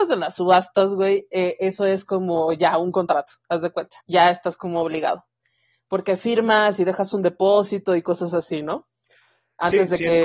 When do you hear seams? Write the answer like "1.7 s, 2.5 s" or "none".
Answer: 4.0 s

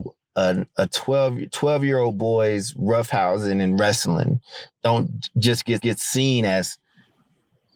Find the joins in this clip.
5.8 s

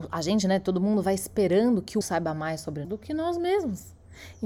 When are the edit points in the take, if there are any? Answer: 2.0 s, 2.8 s

